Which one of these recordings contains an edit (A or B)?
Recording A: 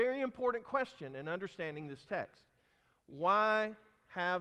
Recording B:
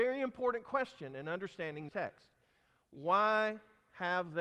B